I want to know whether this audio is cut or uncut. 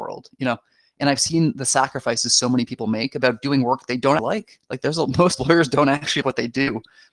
cut